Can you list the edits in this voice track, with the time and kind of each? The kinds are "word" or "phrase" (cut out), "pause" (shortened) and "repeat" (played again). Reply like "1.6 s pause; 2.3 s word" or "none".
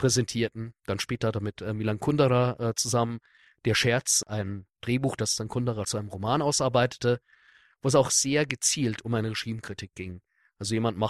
4.3 s word; 5.8 s word